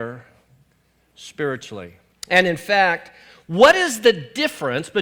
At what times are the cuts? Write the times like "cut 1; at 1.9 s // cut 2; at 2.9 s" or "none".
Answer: cut 1; at 2.1 s